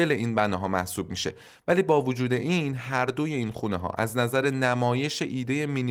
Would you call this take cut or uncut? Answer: uncut